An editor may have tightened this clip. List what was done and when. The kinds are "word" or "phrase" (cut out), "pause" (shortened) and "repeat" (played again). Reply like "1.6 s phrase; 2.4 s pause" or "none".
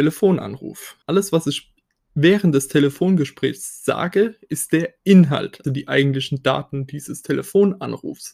1.0 s pause; 5.6 s word